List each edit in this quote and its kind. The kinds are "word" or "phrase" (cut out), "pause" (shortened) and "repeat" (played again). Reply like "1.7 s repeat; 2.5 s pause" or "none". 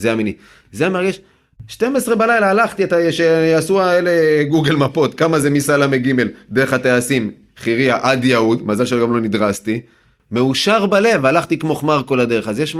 none